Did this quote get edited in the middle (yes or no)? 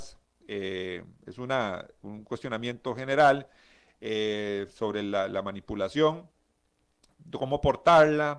no